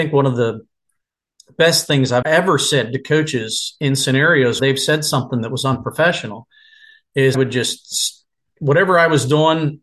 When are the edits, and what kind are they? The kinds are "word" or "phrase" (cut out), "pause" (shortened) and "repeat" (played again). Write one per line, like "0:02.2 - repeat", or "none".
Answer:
0:02.2 - word
0:04.6 - word
0:07.3 - word